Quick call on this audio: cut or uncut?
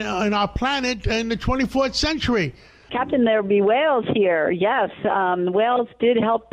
uncut